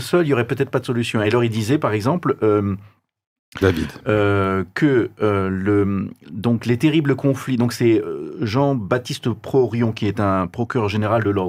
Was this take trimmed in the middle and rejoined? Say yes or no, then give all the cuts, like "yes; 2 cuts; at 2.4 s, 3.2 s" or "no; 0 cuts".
no; 0 cuts